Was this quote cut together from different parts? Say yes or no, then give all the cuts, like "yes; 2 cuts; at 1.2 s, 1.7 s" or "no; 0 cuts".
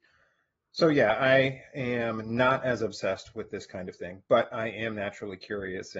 no; 0 cuts